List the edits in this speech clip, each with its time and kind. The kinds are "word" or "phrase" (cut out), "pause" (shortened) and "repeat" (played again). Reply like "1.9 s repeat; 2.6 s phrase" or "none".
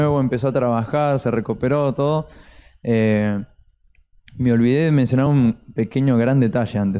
none